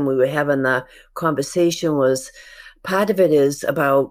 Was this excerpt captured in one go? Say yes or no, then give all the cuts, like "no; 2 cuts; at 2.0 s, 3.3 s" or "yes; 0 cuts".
yes; 0 cuts